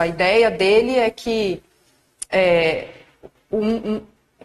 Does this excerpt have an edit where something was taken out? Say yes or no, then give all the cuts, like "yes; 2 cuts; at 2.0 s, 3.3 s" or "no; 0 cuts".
no; 0 cuts